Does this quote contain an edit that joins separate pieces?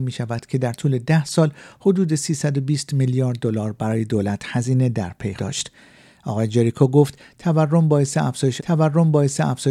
yes; 2 cuts; at 5.4 s, 8.6 s

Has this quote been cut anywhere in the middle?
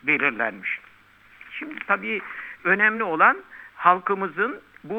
no; 0 cuts

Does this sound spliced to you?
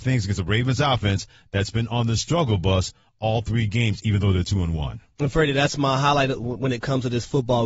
no; 0 cuts

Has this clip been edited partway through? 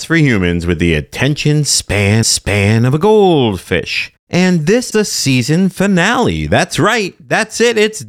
yes; 2 cuts; at 2.2 s, 4.9 s

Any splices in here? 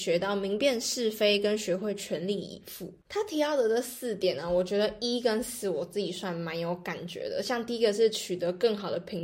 yes; 1 cut; at 3.0 s

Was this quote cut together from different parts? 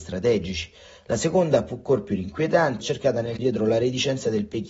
yes; 2 cuts; at 2.8 s, 3.4 s

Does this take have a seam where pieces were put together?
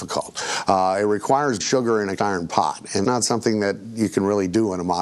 yes; 3 cuts; at 1.6 s, 2.2 s, 3.0 s

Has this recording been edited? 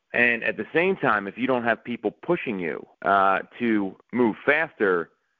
yes; 2 cuts; at 2.9 s, 4.0 s

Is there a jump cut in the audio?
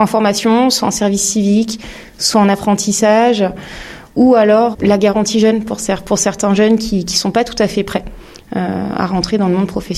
yes; 1 cut; at 4.7 s

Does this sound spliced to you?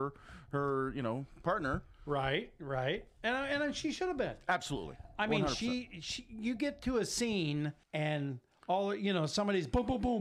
yes; 1 cut; at 7.8 s

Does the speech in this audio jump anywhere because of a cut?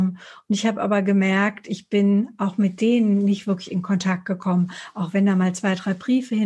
no; 0 cuts

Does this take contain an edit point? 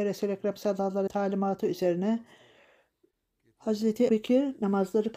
yes; 2 cuts; at 1.1 s, 4.1 s

